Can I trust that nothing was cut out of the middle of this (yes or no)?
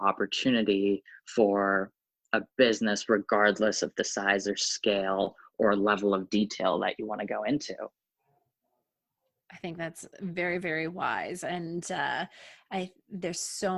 yes